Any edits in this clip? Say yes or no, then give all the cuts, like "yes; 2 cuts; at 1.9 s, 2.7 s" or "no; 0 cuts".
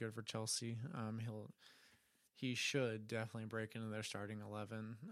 no; 0 cuts